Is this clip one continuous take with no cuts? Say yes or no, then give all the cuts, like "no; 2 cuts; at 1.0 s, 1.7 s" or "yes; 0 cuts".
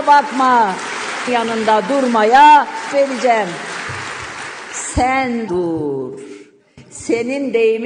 no; 3 cuts; at 1.3 s, 2.9 s, 5.5 s